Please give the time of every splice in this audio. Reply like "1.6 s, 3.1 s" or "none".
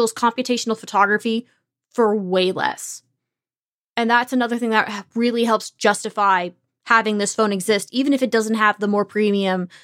none